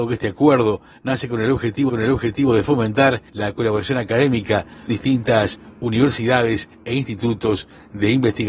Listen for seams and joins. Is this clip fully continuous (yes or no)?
no